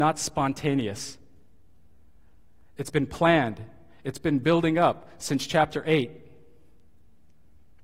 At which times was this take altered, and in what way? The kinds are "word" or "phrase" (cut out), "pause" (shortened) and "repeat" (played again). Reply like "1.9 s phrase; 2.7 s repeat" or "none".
none